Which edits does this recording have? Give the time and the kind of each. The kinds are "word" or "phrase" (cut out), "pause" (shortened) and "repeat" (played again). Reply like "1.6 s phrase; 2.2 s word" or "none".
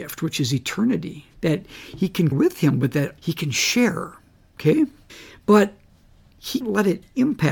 1.3 s pause; 2.3 s word; 3.2 s word; 5.1 s pause; 6.6 s word